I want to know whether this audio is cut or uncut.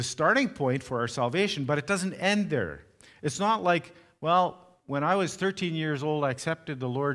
uncut